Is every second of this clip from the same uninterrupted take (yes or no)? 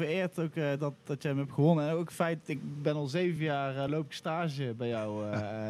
yes